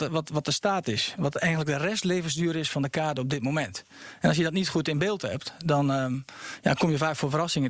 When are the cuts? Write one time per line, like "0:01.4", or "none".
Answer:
none